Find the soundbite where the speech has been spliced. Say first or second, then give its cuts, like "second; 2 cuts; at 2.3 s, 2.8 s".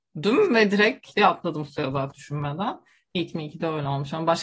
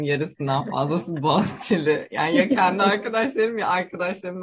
first; 3 cuts; at 1.1 s, 2.1 s, 3.3 s